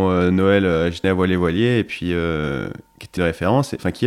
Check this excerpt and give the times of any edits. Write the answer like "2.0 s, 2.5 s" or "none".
1.0 s, 3.2 s